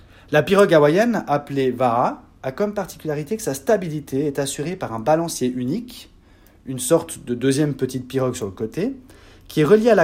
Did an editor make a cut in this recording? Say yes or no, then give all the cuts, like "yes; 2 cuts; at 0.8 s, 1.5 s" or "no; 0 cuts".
no; 0 cuts